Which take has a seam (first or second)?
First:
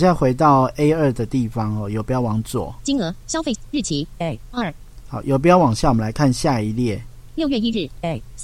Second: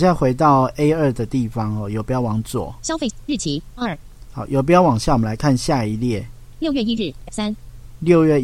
second